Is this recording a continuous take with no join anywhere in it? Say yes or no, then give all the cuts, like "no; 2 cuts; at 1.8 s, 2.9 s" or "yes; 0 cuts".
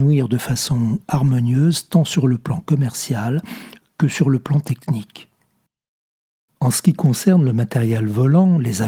yes; 0 cuts